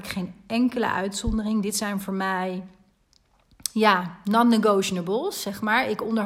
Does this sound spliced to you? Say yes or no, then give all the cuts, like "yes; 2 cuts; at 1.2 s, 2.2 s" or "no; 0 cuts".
no; 0 cuts